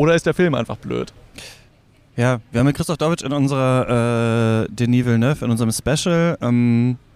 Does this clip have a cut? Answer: no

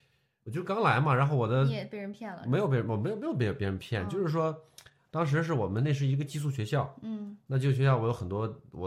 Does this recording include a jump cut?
no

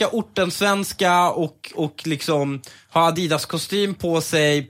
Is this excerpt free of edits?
yes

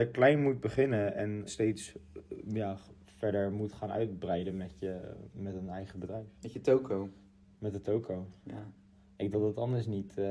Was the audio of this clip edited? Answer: yes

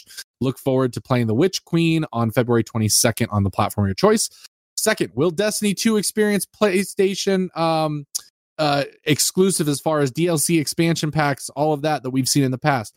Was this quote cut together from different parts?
no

